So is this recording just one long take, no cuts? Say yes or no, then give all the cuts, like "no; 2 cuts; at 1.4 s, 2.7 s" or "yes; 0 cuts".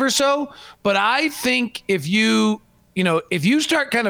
yes; 0 cuts